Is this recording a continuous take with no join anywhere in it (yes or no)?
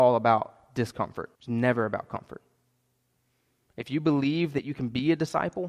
no